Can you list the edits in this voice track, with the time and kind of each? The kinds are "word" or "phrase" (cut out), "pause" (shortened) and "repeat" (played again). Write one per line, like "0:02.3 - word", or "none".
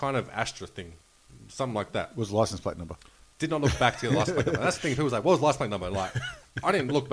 none